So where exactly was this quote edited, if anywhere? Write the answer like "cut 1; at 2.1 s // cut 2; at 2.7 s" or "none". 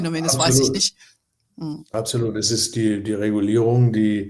none